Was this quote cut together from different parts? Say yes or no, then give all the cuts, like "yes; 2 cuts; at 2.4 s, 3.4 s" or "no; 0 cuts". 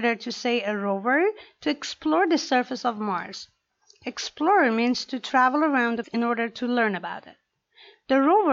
yes; 1 cut; at 6.0 s